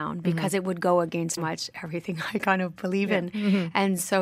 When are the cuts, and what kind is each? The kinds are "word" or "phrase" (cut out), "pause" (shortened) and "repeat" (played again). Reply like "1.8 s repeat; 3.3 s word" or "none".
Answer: 1.4 s word